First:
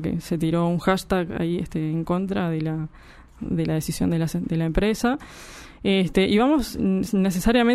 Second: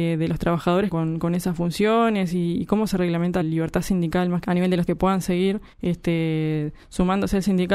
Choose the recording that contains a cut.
second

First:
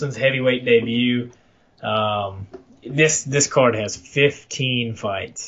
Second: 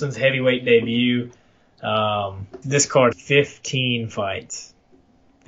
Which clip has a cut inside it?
second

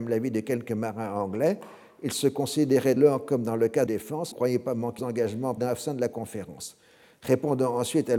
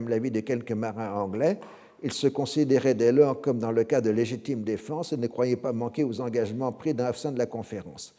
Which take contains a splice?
first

